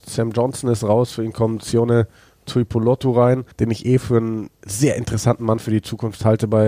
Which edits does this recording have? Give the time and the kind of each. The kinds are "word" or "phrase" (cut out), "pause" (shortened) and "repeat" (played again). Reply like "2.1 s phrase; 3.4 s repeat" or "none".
3.5 s pause; 4.5 s pause